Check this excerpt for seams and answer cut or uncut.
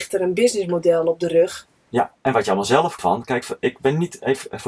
cut